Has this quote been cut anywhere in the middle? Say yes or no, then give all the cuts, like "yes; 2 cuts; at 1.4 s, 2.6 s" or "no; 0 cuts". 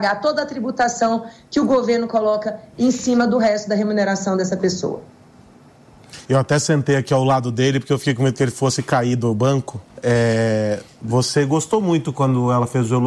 yes; 2 cuts; at 6.3 s, 9.9 s